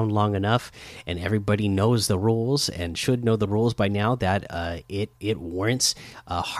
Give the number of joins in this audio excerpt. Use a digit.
1